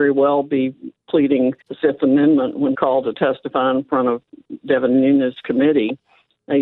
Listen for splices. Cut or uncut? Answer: cut